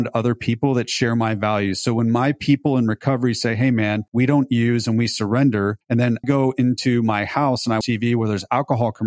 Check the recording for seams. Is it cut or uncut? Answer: cut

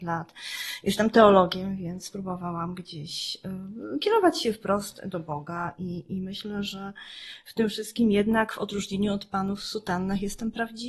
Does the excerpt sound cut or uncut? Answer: uncut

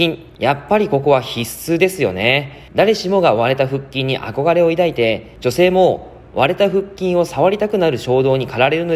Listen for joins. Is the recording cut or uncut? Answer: cut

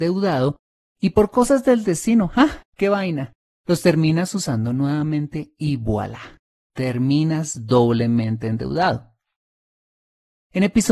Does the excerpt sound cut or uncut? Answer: uncut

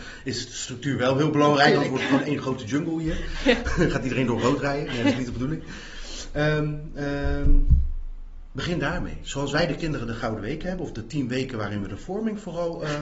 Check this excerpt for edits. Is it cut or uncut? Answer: uncut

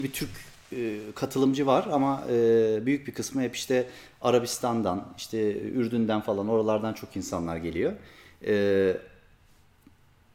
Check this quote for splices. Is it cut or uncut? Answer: uncut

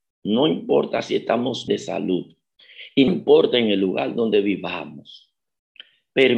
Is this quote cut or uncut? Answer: cut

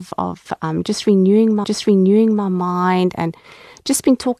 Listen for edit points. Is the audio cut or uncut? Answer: cut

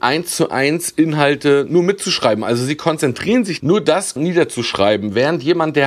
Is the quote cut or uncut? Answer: cut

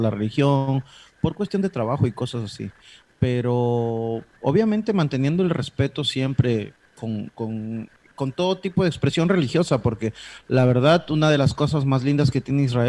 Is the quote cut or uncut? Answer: uncut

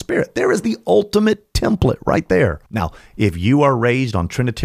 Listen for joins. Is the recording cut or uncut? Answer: cut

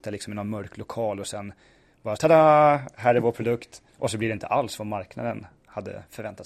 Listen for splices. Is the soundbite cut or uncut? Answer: cut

